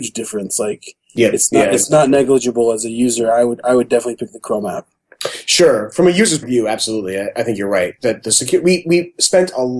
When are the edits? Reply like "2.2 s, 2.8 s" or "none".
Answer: 6.4 s